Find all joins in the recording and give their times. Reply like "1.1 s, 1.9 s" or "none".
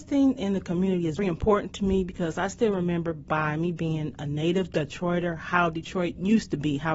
1.2 s